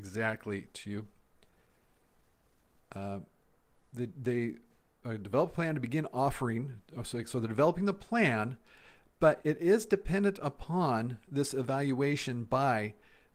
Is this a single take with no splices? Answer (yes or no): yes